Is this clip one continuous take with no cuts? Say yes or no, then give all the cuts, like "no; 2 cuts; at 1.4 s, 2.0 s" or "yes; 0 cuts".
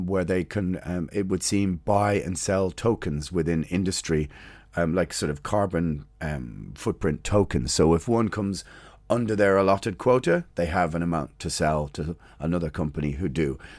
yes; 0 cuts